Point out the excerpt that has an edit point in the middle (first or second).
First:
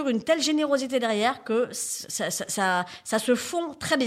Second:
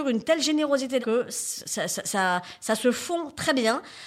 second